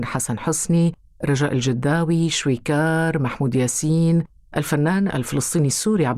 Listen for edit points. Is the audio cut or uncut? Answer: uncut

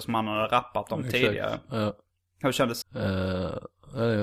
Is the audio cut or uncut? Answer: cut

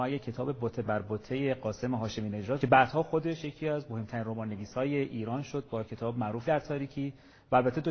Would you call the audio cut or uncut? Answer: cut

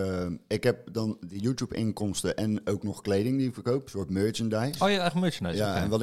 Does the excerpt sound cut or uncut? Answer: uncut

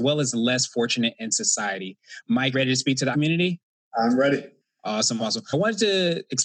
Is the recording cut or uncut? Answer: cut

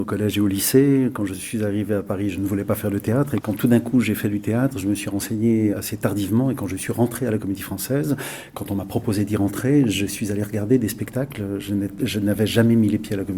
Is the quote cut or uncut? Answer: cut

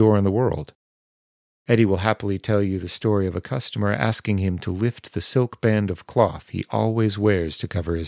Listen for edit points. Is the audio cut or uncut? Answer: uncut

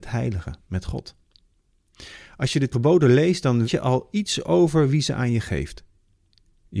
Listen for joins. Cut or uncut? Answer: cut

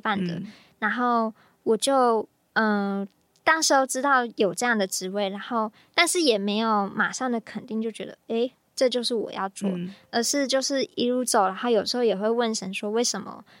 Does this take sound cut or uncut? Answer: uncut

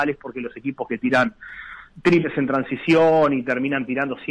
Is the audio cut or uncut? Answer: uncut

